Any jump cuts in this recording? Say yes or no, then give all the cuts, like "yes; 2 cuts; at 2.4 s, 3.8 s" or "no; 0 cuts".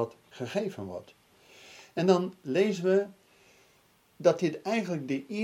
no; 0 cuts